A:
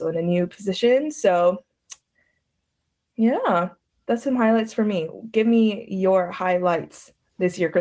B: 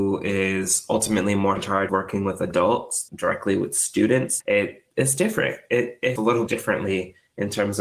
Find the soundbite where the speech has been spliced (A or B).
B